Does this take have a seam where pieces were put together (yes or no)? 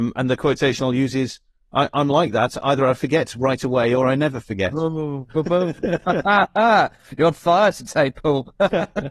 no